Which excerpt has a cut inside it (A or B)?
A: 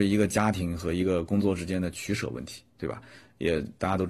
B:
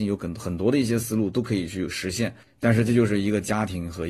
B